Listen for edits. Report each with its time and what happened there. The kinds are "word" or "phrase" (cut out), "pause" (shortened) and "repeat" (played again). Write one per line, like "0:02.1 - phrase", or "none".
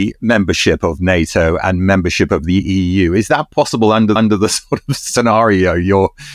0:04.2 - repeat